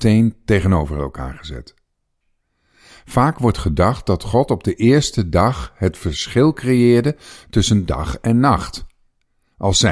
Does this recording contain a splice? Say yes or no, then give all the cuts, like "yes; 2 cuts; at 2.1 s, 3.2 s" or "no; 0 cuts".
no; 0 cuts